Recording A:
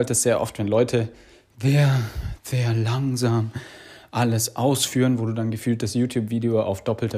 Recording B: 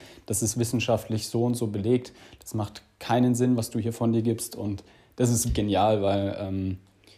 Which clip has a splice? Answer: B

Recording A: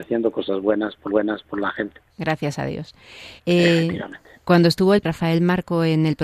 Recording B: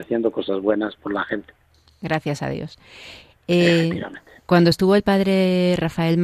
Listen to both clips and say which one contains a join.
A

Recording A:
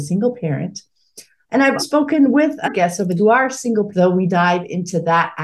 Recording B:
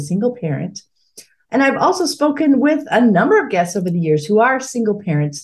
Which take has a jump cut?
A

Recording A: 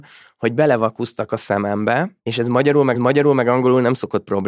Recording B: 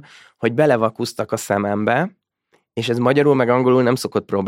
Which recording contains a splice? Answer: A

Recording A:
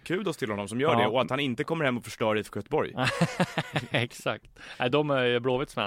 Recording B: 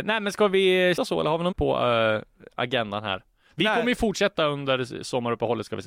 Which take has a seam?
B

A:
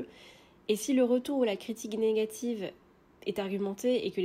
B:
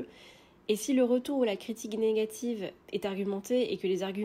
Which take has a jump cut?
B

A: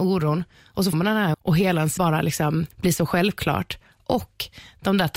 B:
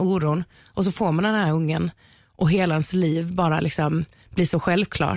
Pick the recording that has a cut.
A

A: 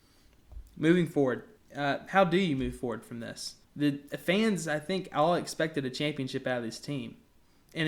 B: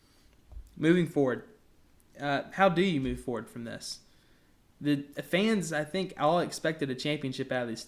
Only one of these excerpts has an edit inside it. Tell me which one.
A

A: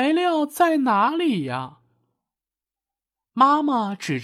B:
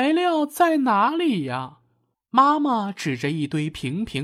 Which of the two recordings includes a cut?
B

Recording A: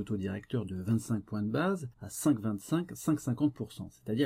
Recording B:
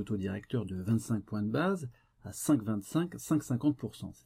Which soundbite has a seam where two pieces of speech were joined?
A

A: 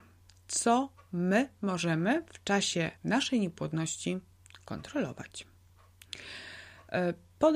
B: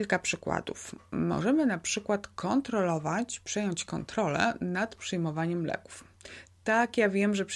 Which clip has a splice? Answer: A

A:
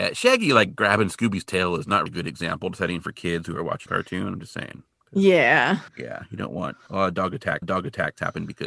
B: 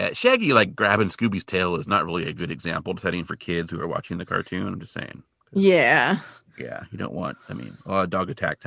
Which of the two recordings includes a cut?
A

